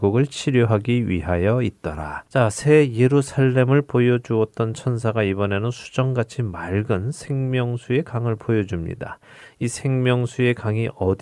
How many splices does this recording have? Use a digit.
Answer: 0